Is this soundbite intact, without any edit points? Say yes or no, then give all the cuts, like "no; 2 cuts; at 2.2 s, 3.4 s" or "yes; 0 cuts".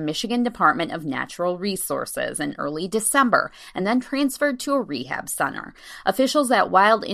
yes; 0 cuts